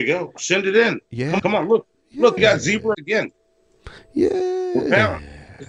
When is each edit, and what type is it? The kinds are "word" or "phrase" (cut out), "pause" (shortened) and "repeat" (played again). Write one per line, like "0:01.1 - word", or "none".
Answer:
0:01.0 - pause
0:01.4 - word
0:02.4 - word
0:02.9 - word
0:04.0 - pause